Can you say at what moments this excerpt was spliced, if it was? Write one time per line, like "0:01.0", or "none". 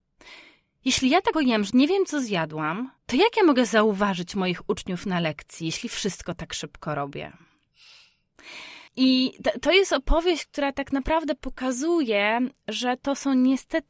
0:01.3
0:01.7
0:03.0
0:08.9